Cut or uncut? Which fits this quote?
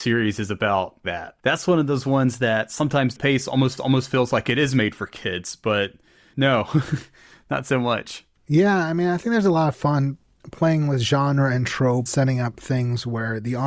cut